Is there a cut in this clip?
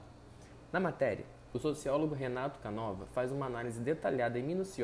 no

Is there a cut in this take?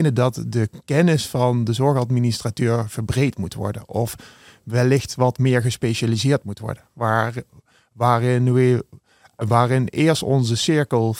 no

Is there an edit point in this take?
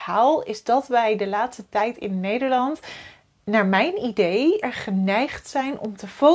yes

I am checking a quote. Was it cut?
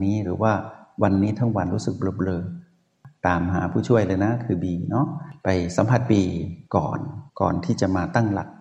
yes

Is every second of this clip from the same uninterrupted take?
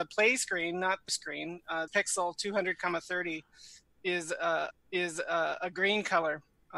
no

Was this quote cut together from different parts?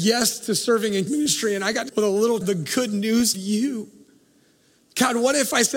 yes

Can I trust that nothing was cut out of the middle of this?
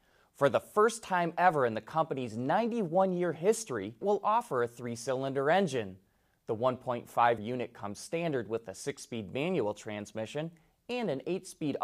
no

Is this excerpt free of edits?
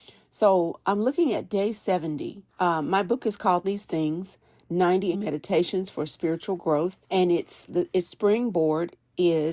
no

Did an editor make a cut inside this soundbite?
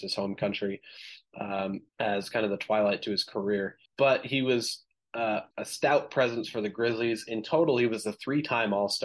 yes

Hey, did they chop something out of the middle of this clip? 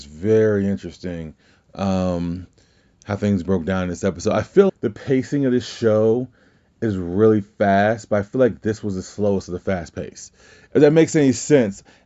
yes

